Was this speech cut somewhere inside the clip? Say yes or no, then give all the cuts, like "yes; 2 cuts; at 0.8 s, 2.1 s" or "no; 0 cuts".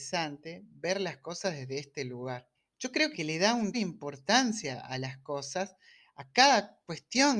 yes; 3 cuts; at 2.5 s, 3.1 s, 3.7 s